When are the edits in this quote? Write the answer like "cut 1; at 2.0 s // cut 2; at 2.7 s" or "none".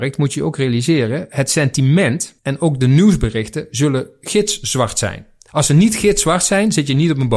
cut 1; at 2.4 s

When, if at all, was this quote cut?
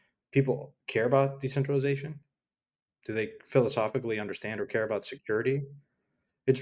none

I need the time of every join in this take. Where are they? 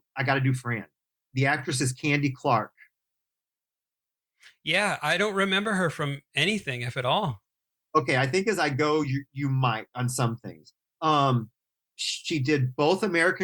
none

